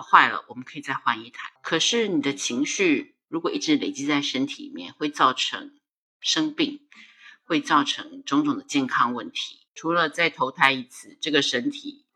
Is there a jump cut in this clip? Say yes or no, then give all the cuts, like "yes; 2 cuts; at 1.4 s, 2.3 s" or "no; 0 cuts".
yes; 2 cuts; at 1.6 s, 9.7 s